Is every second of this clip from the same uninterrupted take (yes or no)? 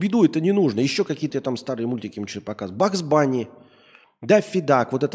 no